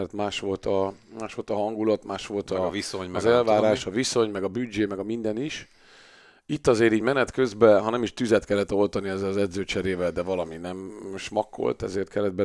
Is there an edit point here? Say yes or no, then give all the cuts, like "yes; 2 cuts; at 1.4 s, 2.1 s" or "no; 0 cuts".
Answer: no; 0 cuts